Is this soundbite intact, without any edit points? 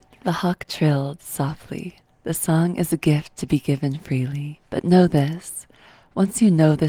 no; 1 cut; at 4.7 s

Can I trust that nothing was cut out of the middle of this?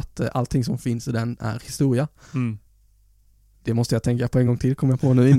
yes; 0 cuts

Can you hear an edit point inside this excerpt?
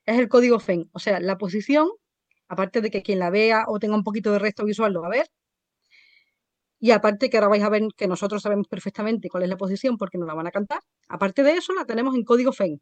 no; 0 cuts

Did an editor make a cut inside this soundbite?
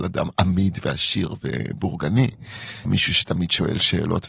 yes; 1 cut; at 2.8 s

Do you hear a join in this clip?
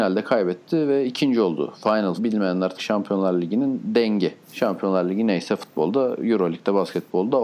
yes; 3 cuts; at 2.2 s, 2.8 s, 4.4 s

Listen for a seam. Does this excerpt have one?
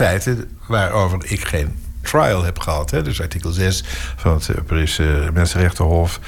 yes; 1 cut; at 2.0 s

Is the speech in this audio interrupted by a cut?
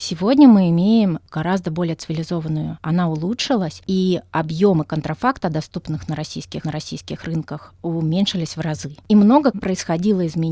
yes; 4 cuts; at 2.8 s, 6.6 s, 9.0 s, 9.5 s

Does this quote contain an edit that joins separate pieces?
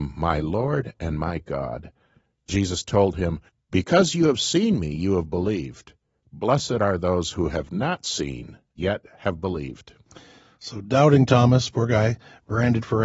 yes; 3 cuts; at 2.5 s, 3.5 s, 8.8 s

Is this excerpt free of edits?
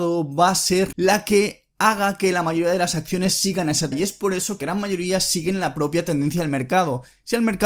no; 3 cuts; at 0.9 s, 3.9 s, 4.6 s

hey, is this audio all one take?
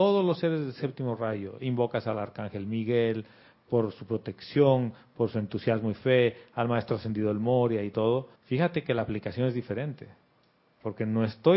no; 1 cut; at 8.4 s

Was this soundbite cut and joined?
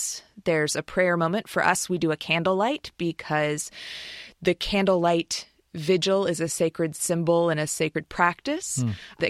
no; 0 cuts

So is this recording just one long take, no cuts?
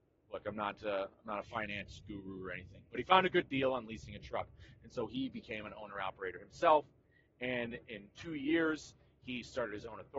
yes; 0 cuts

